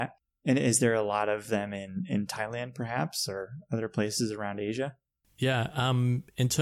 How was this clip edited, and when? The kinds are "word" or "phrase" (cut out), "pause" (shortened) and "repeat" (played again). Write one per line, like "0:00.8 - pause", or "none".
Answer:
none